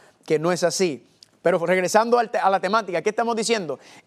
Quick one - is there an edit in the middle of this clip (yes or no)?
no